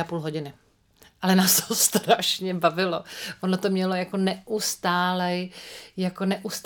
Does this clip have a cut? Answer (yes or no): no